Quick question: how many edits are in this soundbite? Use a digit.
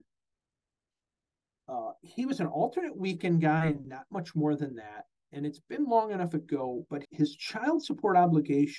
1